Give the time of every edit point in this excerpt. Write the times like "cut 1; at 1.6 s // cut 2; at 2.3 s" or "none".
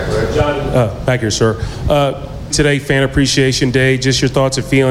cut 1; at 2.5 s